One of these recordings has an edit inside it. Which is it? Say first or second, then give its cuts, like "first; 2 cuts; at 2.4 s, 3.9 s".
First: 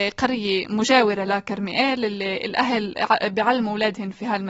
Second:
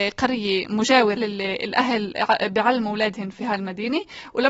second; 1 cut; at 1.2 s